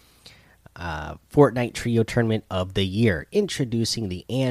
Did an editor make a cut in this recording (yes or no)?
no